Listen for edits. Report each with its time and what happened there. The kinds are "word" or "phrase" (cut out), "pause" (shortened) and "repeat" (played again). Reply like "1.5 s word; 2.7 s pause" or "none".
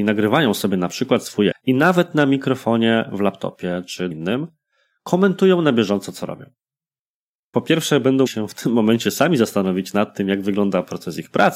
1.5 s word; 4.1 s word; 8.3 s word